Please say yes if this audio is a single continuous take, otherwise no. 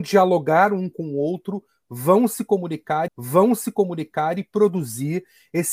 no